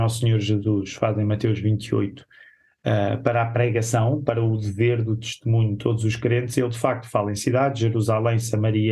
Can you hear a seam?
no; 0 cuts

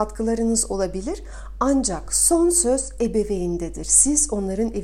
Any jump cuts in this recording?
no; 0 cuts

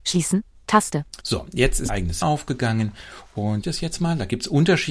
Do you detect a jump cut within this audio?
yes; 4 cuts; at 1.2 s, 1.9 s, 2.2 s, 3.6 s

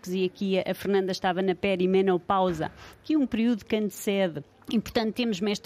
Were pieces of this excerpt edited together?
yes; 1 cut; at 4.5 s

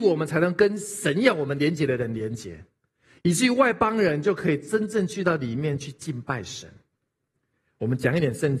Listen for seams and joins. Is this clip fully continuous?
yes; 0 cuts

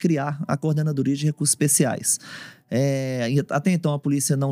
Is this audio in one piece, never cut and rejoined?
yes; 0 cuts

